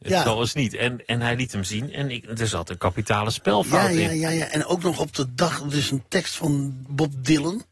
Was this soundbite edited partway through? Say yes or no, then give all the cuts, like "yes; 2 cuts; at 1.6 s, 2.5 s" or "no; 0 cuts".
no; 0 cuts